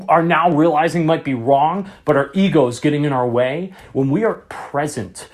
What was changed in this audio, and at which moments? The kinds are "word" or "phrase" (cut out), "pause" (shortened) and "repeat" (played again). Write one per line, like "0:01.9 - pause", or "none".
none